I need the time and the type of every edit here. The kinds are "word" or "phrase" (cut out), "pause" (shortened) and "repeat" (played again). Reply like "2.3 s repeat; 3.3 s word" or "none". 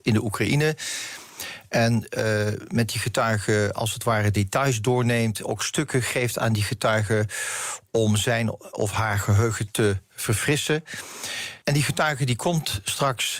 11.6 s pause